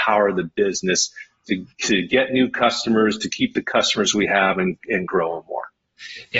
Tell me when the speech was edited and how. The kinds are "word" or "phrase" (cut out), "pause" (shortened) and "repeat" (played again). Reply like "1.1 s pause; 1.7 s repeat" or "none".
none